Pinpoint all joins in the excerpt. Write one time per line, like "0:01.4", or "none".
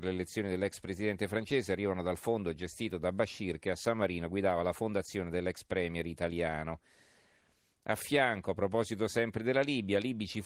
none